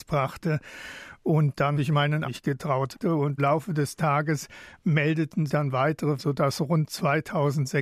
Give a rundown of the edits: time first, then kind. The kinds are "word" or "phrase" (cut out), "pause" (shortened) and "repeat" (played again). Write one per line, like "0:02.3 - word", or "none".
0:01.7 - word
0:02.2 - word
0:03.4 - word
0:05.5 - word
0:06.2 - word